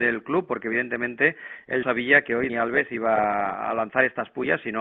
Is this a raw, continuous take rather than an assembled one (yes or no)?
no